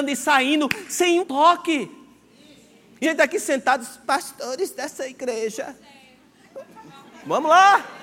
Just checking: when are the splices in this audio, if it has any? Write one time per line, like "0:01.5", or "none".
0:01.2
0:03.0
0:04.0